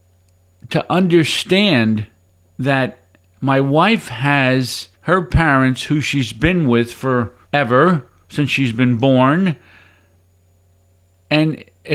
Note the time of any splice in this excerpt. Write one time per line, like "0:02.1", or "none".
0:02.3
0:04.9
0:07.4